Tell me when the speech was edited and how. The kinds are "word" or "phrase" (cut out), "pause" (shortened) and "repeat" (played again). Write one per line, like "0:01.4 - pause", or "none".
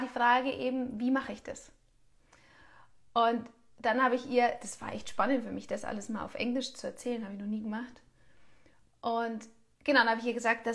none